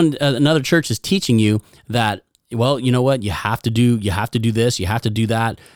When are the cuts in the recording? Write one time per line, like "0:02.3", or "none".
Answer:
none